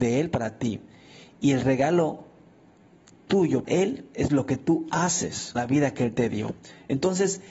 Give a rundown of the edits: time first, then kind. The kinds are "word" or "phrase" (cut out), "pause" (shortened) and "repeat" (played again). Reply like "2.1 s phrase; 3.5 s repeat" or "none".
3.6 s word; 5.6 s word